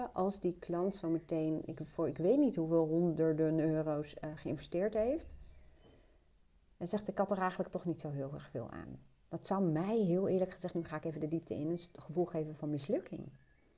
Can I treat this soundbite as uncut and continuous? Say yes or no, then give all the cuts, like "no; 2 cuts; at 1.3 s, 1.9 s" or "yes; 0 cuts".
yes; 0 cuts